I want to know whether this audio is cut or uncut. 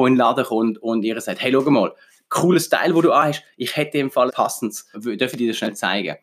cut